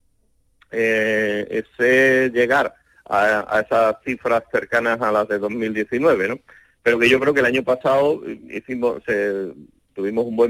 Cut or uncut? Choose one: uncut